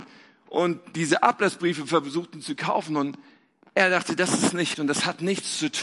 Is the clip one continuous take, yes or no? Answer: no